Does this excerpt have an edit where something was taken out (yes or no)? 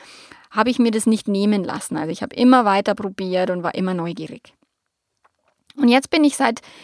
no